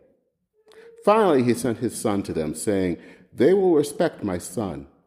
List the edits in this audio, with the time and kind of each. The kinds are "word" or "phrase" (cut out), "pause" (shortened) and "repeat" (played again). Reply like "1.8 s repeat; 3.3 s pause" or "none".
none